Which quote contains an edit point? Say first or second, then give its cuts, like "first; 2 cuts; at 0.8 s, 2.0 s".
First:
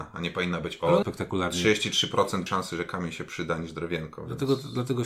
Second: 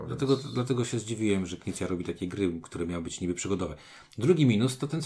first; 2 cuts; at 1.0 s, 2.5 s